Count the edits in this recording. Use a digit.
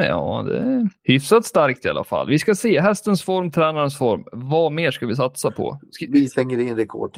1